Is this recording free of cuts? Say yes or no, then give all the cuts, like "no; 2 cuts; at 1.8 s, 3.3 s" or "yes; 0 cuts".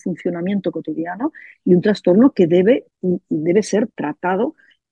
yes; 0 cuts